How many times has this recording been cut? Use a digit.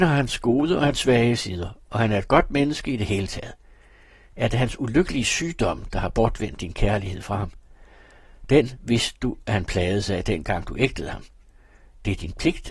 0